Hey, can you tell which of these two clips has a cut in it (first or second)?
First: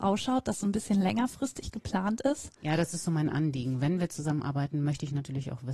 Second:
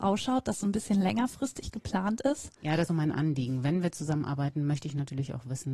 second